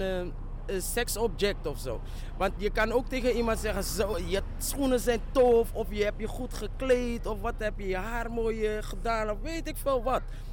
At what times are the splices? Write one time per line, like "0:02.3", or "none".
0:02.6